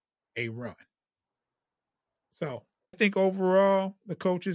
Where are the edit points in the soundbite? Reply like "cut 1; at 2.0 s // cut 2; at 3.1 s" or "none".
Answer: cut 1; at 2.9 s